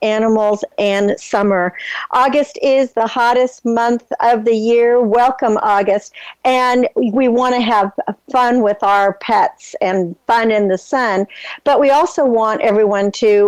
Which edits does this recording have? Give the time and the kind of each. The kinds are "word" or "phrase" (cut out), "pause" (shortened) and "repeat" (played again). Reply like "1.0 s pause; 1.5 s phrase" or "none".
none